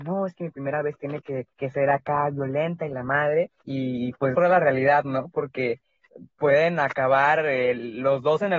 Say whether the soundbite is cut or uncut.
cut